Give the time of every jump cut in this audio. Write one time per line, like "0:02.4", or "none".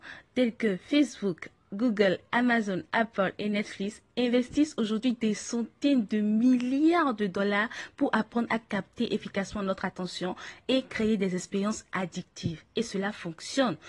none